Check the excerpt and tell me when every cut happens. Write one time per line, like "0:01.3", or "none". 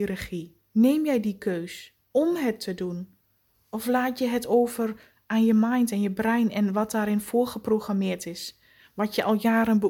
0:02.0

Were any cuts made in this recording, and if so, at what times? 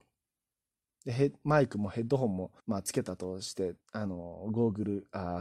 0:02.6
0:03.8

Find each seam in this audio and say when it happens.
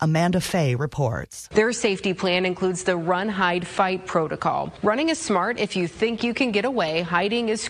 none

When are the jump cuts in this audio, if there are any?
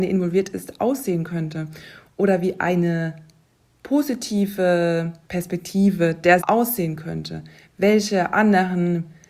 0:06.4

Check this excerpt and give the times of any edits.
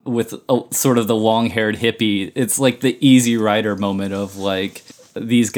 none

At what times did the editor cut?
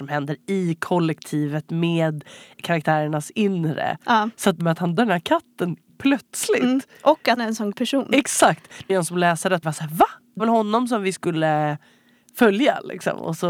0:02.6
0:04.6
0:05.0
0:05.9
0:07.4
0:07.7
0:08.9
0:09.6
0:10.4

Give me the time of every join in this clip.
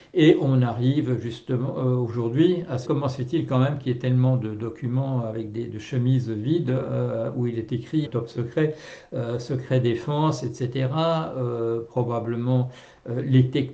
0:02.8
0:08.0

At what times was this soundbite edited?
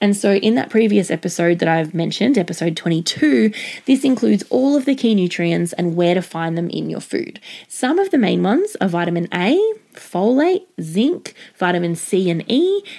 none

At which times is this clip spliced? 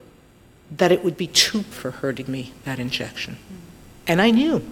0:01.7
0:02.3

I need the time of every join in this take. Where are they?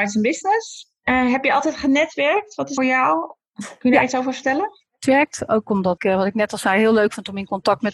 0:02.8
0:06.0

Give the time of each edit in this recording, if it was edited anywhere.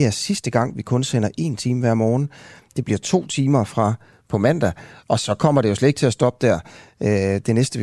none

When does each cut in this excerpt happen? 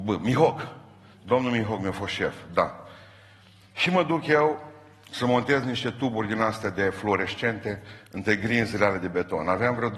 none

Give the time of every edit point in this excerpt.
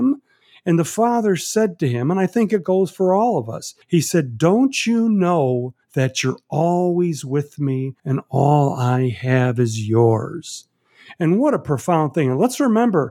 0:03.8
0:05.8
0:08.0

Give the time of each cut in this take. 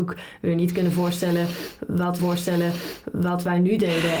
0:02.2

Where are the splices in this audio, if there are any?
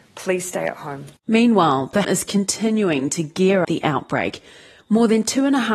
0:01.2
0:02.0
0:03.6

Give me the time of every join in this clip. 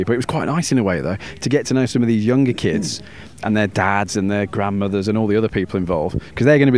none

